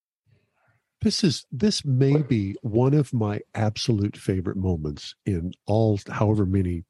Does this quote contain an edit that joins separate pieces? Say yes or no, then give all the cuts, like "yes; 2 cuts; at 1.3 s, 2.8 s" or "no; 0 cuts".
no; 0 cuts